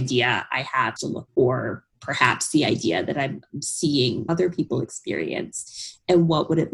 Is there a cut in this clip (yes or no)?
yes